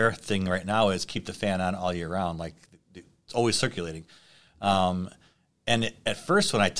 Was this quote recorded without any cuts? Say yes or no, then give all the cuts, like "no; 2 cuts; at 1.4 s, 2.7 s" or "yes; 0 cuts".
yes; 0 cuts